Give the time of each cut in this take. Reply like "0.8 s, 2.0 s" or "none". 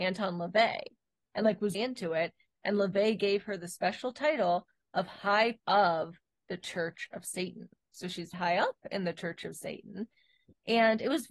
1.7 s, 5.6 s, 8.3 s